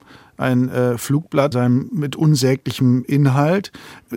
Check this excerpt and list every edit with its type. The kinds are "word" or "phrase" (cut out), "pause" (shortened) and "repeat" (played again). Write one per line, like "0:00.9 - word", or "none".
0:01.5 - word
0:01.9 - word